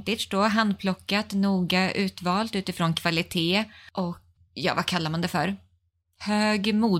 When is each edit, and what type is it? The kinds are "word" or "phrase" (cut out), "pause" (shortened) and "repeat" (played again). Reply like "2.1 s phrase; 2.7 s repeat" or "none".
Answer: 4.4 s word